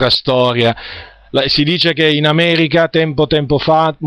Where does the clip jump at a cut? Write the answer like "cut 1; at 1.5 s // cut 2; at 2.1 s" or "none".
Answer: cut 1; at 2.0 s